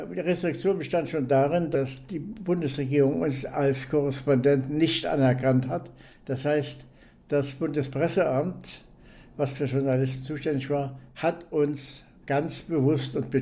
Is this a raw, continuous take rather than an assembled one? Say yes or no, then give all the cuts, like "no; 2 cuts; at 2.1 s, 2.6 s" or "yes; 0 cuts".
yes; 0 cuts